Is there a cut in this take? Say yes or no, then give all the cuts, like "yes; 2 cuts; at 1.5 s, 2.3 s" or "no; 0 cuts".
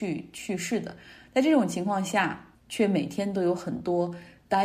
yes; 1 cut; at 2.5 s